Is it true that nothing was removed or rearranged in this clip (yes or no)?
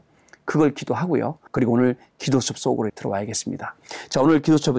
no